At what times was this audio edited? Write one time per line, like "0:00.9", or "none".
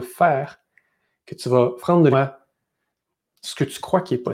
0:01.8
0:02.1